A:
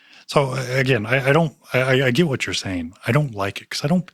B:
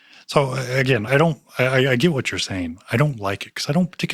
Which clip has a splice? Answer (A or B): B